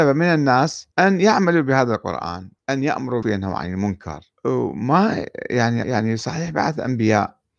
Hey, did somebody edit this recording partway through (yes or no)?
yes